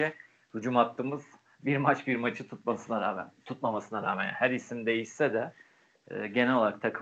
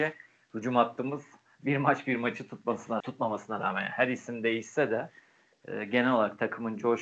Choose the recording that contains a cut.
second; 1 cut; at 3.0 s

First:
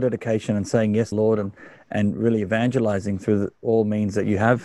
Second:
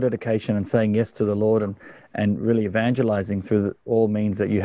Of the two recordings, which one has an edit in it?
first; 1 cut; at 1.1 s

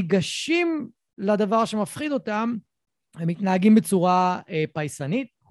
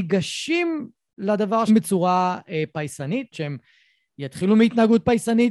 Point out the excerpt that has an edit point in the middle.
second; 2 cuts; at 1.7 s, 3.3 s

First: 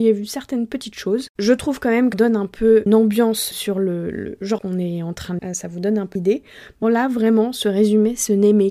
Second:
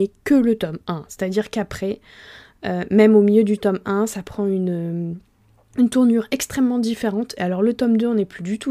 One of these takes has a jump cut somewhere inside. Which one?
first; 7 cuts; at 2.1 s, 2.9 s, 3.5 s, 4.6 s, 5.4 s, 6.2 s, 6.8 s

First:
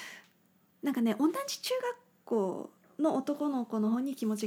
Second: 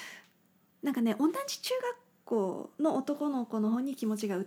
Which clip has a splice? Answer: second; 1 cut; at 2.7 s

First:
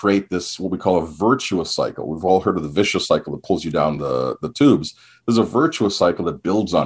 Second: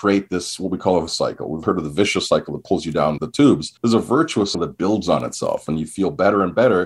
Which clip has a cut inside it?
second; 5 cuts; at 1.1 s, 1.6 s, 3.2 s, 3.8 s, 4.5 s

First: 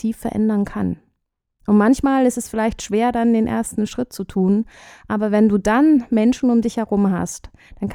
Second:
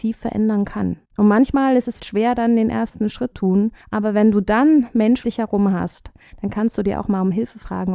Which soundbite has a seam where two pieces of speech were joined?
second; 5 cuts; at 1.0 s, 2.0 s, 3.3 s, 3.8 s, 5.2 s

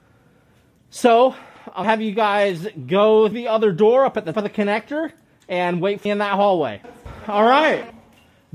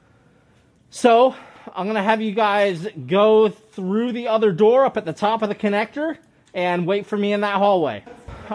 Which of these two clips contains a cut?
first; 4 cuts; at 1.8 s, 3.3 s, 4.3 s, 6.1 s

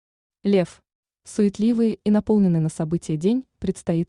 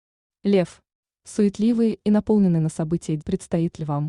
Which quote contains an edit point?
second; 1 cut; at 3.2 s

